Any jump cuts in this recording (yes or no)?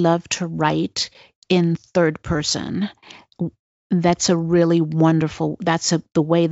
no